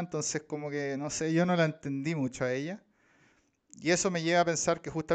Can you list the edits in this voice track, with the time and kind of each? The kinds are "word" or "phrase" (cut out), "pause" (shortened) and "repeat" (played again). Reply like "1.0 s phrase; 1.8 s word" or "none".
none